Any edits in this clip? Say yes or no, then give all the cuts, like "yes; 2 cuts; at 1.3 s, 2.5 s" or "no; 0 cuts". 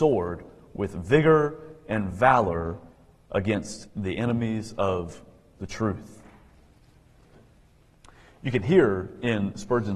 no; 0 cuts